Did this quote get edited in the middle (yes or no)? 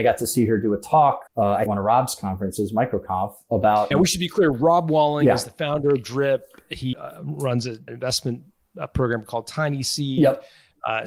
yes